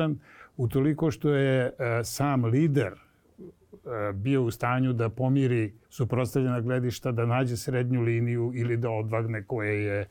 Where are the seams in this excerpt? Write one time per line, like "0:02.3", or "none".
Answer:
0:05.8